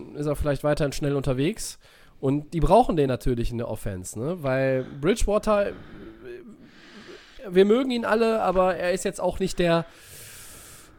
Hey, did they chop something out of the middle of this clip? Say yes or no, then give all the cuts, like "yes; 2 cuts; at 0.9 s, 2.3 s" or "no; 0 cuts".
no; 0 cuts